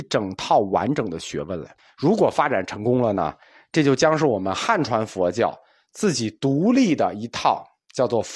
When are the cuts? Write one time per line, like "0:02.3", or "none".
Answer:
0:01.8